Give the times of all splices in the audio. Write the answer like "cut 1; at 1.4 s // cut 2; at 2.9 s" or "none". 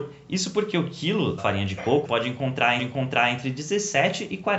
cut 1; at 1.4 s // cut 2; at 2.0 s // cut 3; at 2.8 s

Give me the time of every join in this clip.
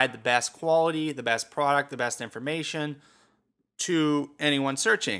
none

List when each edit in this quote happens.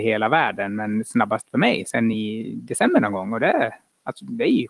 none

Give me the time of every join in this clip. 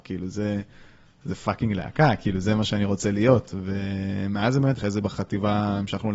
cut 1; at 4.8 s

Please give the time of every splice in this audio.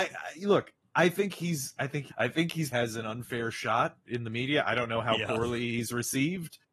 cut 1; at 2.1 s // cut 2; at 2.7 s

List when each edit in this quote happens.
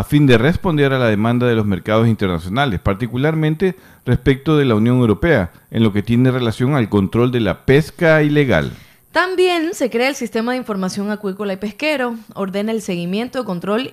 none

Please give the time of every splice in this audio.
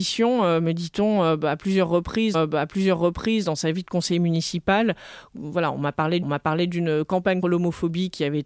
cut 1; at 2.3 s // cut 2; at 6.2 s // cut 3; at 7.4 s

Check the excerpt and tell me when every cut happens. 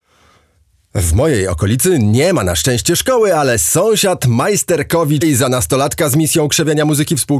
cut 1; at 5.2 s

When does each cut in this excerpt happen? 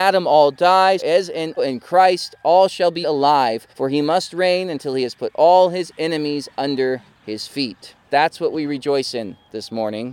cut 1; at 1.0 s // cut 2; at 1.6 s // cut 3; at 3.0 s // cut 4; at 3.7 s // cut 5; at 8.0 s

